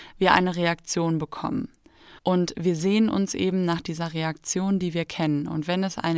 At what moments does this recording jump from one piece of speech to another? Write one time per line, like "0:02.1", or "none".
0:02.2